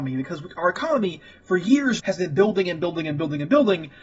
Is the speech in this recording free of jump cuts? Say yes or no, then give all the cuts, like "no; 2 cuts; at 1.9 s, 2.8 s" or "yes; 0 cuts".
no; 1 cut; at 2.0 s